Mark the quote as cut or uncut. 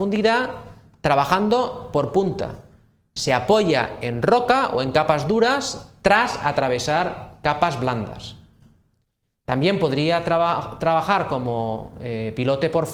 uncut